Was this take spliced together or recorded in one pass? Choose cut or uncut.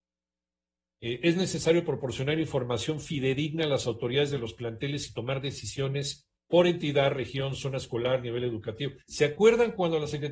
cut